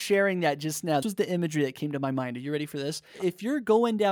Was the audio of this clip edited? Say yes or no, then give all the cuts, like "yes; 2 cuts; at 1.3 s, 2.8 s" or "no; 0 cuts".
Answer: yes; 1 cut; at 1.0 s